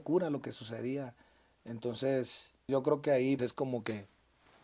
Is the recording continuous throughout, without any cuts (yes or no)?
no